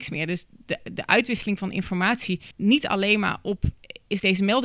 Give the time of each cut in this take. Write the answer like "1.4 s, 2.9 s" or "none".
2.5 s